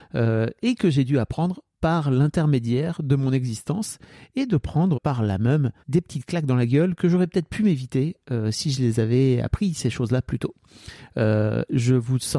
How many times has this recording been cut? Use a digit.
3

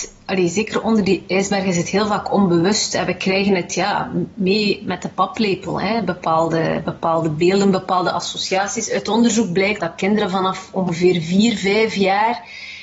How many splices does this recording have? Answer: 1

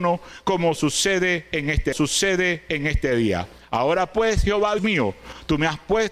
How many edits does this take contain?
2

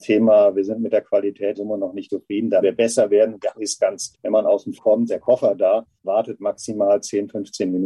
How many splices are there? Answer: 8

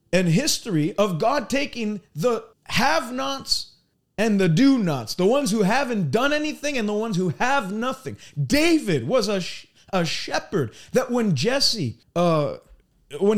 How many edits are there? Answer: 3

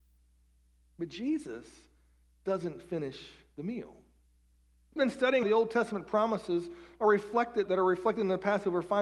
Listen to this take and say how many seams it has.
3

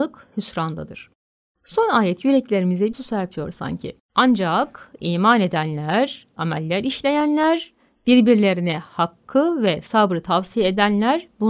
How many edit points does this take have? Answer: 3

